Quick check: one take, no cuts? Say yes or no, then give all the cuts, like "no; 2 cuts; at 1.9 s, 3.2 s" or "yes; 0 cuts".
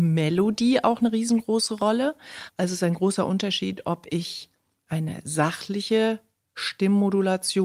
yes; 0 cuts